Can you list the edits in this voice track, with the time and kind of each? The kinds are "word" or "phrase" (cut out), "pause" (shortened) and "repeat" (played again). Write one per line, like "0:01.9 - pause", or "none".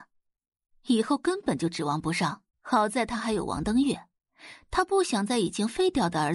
0:02.5 - pause